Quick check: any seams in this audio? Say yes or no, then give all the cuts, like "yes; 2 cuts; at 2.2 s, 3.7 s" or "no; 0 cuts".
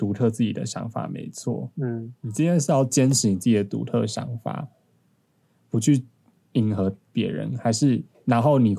no; 0 cuts